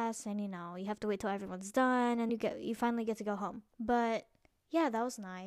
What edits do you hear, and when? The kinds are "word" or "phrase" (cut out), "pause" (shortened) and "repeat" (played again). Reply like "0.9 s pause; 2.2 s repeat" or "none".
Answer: 2.3 s word; 3.7 s pause